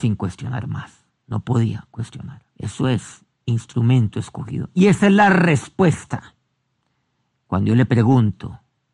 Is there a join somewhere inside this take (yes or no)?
yes